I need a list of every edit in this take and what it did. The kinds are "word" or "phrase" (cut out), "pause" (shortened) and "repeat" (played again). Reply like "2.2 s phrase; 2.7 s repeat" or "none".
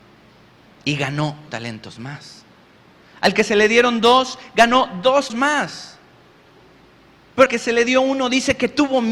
1.5 s word; 5.3 s word; 7.5 s word